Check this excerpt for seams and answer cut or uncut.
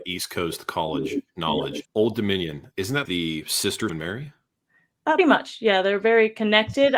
cut